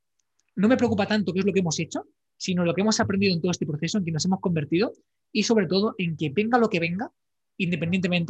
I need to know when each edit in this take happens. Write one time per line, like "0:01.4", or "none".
none